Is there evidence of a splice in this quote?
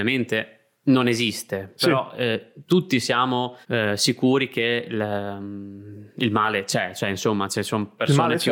yes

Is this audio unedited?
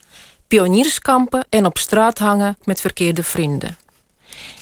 no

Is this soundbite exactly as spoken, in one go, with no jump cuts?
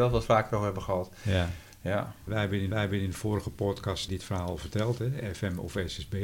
no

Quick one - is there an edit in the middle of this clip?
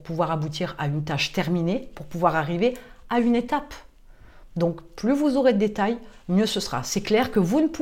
no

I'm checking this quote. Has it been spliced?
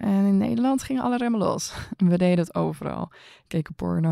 no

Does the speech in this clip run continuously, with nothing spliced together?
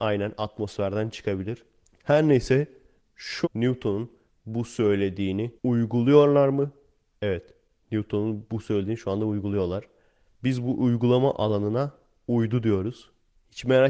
no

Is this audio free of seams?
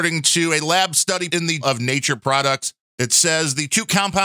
no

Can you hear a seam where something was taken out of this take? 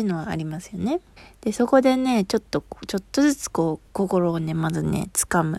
yes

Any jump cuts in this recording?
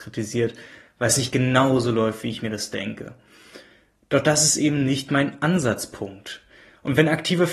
no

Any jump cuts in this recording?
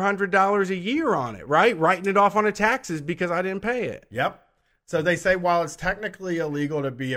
no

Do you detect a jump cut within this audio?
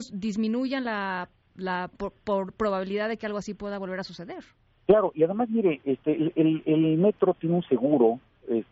no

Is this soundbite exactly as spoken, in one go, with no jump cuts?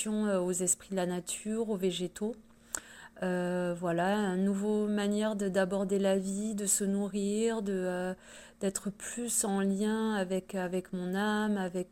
yes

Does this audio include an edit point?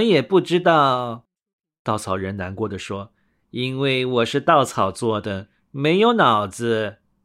no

